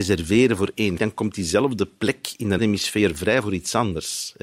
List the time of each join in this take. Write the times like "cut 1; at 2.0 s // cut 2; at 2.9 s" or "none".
cut 1; at 1.0 s // cut 2; at 2.6 s